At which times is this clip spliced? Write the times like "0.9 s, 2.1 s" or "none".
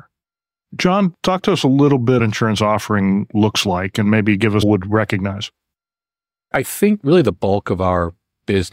2.2 s, 4.6 s